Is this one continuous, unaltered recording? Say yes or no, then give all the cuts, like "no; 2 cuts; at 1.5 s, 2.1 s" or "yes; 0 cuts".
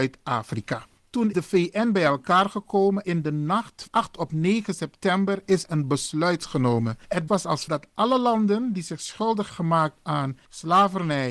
no; 7 cuts; at 1.3 s, 3.0 s, 3.9 s, 5.7 s, 7.3 s, 7.7 s, 9.5 s